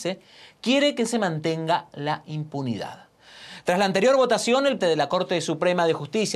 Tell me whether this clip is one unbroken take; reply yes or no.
no